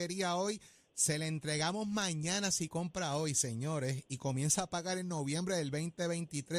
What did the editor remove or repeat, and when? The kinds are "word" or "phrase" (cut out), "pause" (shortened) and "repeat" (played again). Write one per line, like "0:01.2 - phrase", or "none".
none